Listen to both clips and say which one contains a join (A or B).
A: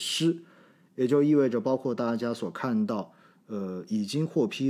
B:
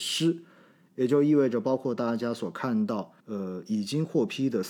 B